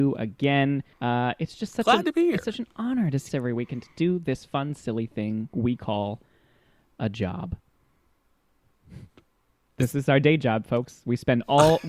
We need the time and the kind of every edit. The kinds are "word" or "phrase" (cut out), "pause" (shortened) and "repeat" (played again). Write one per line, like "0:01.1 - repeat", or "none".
0:00.9 - pause
0:03.3 - phrase